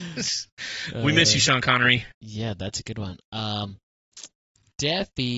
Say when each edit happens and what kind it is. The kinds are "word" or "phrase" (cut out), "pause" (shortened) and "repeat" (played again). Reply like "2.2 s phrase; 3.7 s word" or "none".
2.1 s pause